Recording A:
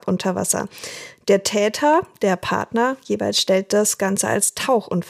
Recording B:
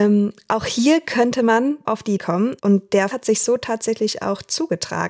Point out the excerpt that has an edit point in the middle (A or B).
B